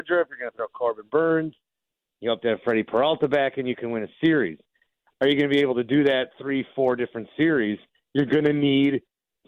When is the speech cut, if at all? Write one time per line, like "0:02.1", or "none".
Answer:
none